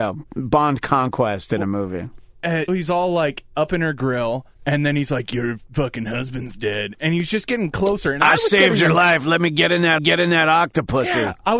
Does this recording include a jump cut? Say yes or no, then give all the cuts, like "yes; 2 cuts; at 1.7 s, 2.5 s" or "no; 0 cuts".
yes; 3 cuts; at 2.7 s, 4.5 s, 10.0 s